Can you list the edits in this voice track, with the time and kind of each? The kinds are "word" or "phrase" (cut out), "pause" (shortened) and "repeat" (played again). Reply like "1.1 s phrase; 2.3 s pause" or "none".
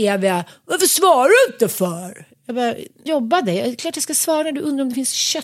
3.1 s phrase